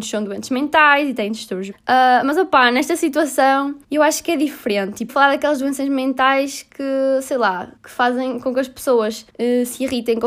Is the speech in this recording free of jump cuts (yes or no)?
no